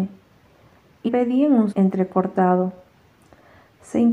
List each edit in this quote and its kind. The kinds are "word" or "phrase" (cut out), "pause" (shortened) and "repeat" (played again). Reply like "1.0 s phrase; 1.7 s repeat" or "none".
1.1 s word; 1.7 s word